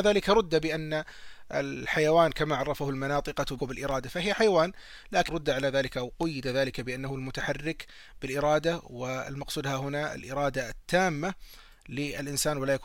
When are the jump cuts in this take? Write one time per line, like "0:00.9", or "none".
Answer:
0:03.6
0:05.3